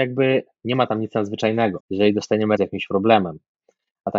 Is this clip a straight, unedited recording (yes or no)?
no